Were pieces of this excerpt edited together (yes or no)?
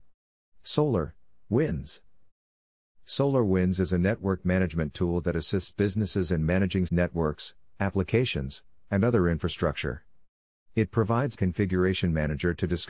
yes